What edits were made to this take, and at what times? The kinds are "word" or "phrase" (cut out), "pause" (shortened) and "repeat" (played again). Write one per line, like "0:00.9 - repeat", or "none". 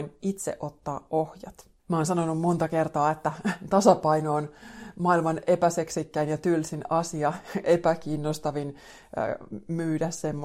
0:01.8 - pause